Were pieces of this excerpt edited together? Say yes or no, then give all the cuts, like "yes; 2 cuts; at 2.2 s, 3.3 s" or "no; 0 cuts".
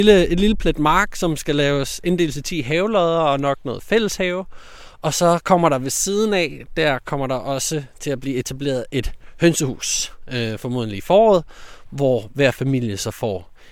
no; 0 cuts